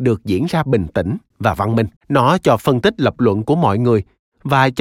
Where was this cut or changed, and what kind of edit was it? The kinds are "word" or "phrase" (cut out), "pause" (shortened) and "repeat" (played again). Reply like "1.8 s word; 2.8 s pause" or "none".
1.3 s phrase; 2.0 s pause; 2.6 s phrase